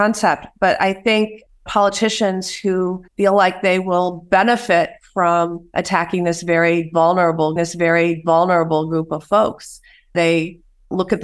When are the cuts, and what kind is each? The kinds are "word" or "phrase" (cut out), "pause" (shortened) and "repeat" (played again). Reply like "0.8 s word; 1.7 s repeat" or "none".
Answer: 1.7 s phrase; 3.1 s pause; 7.6 s repeat